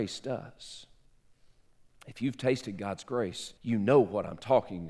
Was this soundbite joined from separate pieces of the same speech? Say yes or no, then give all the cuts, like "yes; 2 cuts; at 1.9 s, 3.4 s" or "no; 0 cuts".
yes; 1 cut; at 3.6 s